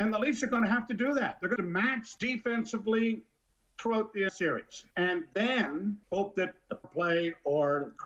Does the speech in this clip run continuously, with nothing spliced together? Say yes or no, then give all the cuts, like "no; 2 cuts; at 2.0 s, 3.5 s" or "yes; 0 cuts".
no; 6 cuts; at 1.6 s, 2.2 s, 4.3 s, 4.9 s, 6.0 s, 6.8 s